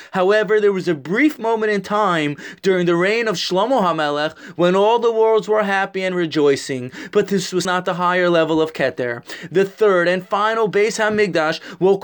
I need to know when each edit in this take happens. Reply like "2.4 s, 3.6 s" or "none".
7.6 s